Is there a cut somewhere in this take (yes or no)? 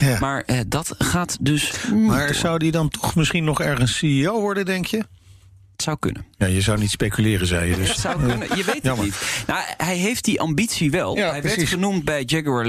no